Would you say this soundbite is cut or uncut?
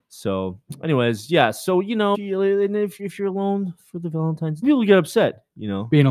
cut